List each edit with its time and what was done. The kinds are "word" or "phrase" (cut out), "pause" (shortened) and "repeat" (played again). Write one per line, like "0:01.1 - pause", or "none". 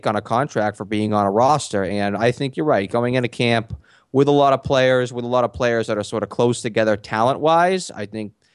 none